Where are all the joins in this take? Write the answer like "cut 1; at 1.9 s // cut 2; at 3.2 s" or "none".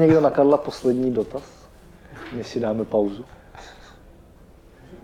none